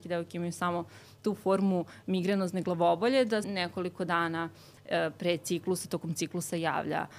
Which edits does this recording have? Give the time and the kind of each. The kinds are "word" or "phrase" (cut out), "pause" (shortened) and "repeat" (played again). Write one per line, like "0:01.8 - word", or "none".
0:03.4 - word